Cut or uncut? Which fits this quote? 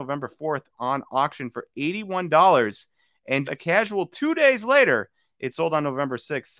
cut